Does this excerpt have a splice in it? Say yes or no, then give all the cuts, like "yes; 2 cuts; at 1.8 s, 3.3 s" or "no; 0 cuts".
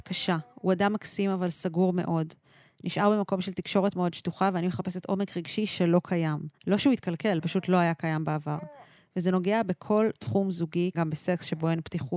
yes; 2 cuts; at 6.6 s, 10.9 s